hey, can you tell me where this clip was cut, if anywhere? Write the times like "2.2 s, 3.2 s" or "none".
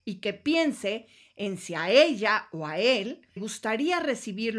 3.4 s